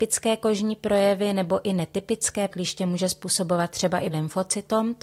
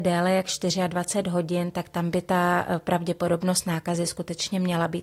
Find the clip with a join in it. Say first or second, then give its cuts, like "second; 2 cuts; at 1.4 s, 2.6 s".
first; 2 cuts; at 2.5 s, 4.1 s